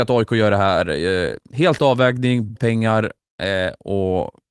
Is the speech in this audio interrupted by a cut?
yes; 2 cuts; at 1.8 s, 2.6 s

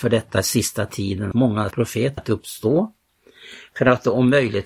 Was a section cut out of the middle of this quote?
yes; 3 cuts; at 1.3 s, 1.7 s, 2.2 s

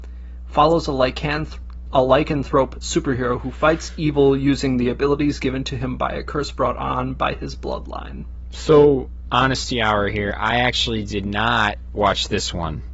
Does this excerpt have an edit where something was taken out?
no; 0 cuts

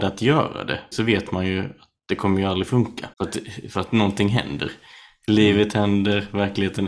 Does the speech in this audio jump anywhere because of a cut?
yes; 2 cuts; at 0.9 s, 3.1 s

